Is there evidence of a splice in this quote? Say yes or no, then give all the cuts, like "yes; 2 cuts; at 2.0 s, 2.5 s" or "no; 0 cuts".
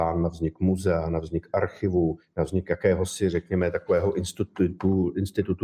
no; 0 cuts